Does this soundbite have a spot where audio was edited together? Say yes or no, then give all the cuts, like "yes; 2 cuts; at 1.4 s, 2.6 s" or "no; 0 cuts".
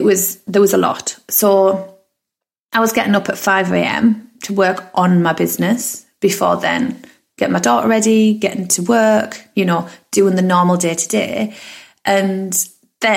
no; 0 cuts